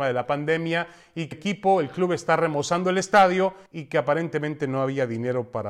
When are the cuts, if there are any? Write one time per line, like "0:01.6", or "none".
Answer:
0:01.3
0:03.7